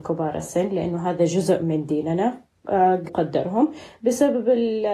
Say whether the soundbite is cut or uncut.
cut